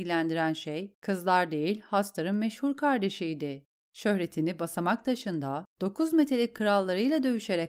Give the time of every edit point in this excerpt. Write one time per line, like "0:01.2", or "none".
none

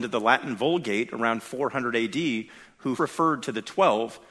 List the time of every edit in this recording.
0:03.0

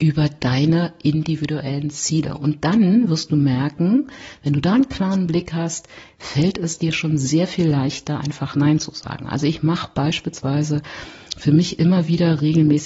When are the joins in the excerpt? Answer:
none

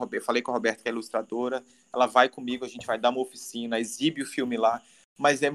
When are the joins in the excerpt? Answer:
none

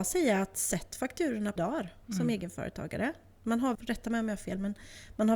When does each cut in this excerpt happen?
0:01.6
0:02.0
0:03.7

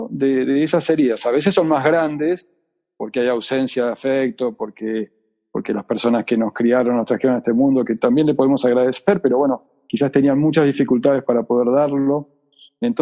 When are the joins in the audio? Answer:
none

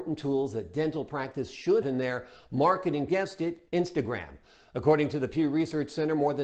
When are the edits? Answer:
0:01.8
0:03.1
0:03.7

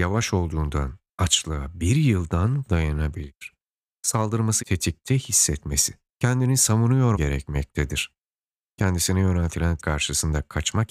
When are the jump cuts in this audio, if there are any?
0:02.7
0:04.6
0:07.1
0:09.8

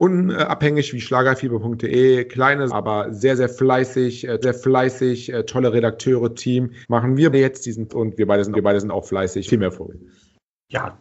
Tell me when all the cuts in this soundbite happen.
0:02.7
0:04.4
0:06.4
0:06.8
0:07.3
0:07.9
0:08.5
0:09.5

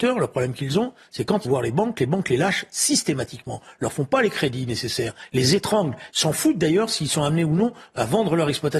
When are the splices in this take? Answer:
0:01.4
0:06.1

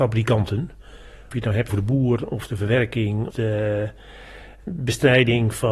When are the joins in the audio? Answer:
0:01.3
0:01.7
0:03.3
0:04.6

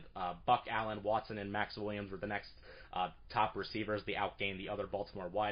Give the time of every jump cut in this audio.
none

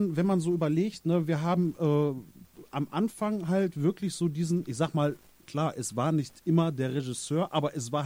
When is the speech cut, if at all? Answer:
none

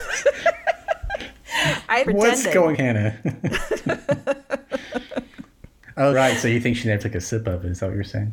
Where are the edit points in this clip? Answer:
0:02.1
0:02.7
0:06.1
0:07.0

